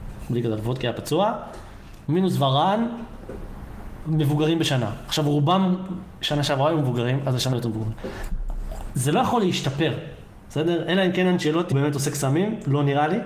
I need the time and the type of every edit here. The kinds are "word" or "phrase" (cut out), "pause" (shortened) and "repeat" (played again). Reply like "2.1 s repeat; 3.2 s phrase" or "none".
7.5 s word; 11.7 s word